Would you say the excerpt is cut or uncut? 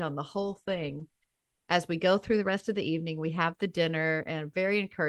uncut